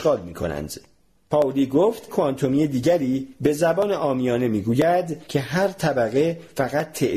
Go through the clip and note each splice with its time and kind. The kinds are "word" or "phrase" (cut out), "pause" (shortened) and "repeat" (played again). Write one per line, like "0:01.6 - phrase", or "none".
0:02.1 - word